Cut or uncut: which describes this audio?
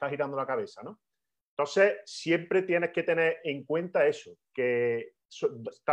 uncut